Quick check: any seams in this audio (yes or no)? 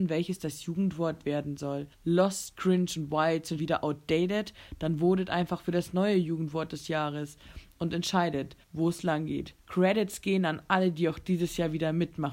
yes